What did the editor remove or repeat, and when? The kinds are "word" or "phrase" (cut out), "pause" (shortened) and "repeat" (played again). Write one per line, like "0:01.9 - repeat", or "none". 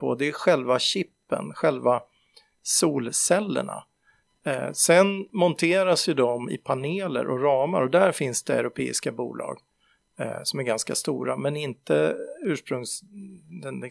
none